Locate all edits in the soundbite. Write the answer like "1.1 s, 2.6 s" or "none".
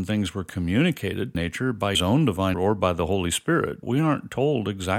1.3 s, 1.9 s, 2.5 s, 3.8 s